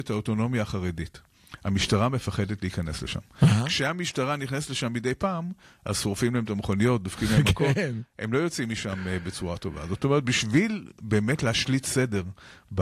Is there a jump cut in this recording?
no; 0 cuts

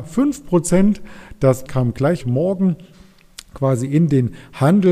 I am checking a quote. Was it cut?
yes; 2 cuts; at 1.7 s, 2.2 s

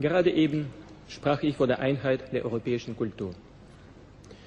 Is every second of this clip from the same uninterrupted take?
yes; 0 cuts

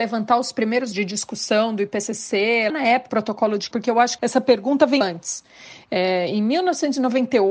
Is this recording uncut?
no; 6 cuts; at 0.9 s, 2.7 s, 3.1 s, 3.7 s, 4.2 s, 5.0 s

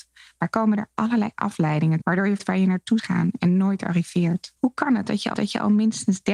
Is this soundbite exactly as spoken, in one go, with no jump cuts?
no; 5 cuts; at 2.0 s, 2.4 s, 3.0 s, 4.6 s, 5.3 s

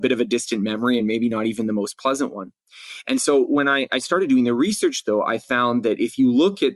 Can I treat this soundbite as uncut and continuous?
yes; 0 cuts

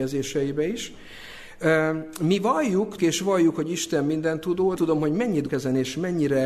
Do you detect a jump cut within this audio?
yes; 3 cuts; at 3.0 s, 4.8 s, 5.5 s

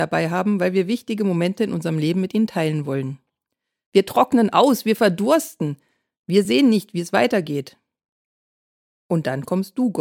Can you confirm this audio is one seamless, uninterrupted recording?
yes; 0 cuts

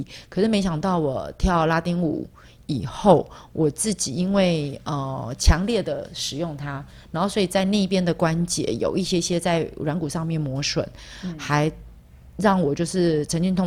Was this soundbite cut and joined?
no; 0 cuts

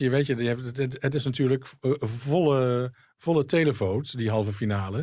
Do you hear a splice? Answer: no; 0 cuts

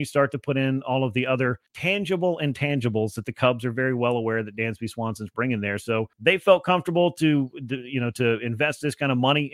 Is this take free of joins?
no; 2 cuts; at 1.7 s, 6.1 s

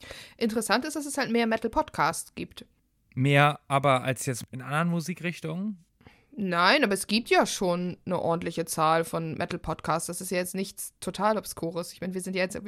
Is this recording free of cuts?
no; 1 cut; at 2.8 s

